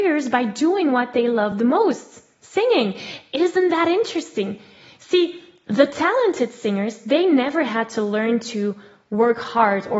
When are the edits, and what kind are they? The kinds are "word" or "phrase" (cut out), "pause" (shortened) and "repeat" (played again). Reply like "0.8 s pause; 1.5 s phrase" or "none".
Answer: none